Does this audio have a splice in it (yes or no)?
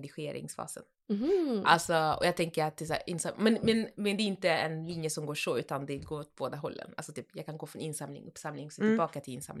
no